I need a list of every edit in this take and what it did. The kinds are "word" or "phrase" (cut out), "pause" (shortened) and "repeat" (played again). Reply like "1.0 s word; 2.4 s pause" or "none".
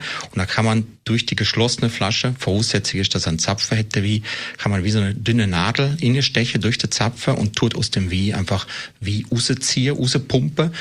none